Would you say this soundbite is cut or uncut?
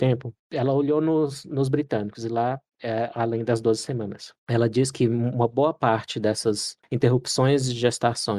uncut